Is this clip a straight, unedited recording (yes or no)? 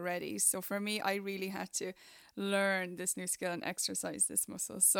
yes